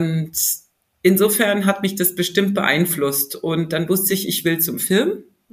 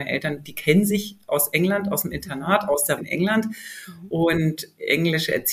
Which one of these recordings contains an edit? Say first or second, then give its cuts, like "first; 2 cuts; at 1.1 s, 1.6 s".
second; 1 cut; at 3.0 s